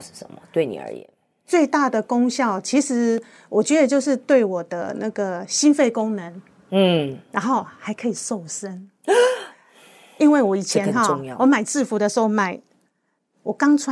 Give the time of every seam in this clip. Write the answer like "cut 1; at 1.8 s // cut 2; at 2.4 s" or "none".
none